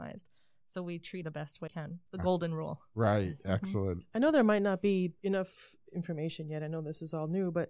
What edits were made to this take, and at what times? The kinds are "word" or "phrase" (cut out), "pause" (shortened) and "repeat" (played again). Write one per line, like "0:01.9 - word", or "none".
0:01.2 - word
0:01.7 - word
0:02.1 - pause
0:05.2 - pause